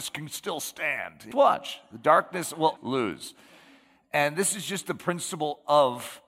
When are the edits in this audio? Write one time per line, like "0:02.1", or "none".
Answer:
0:01.3
0:02.8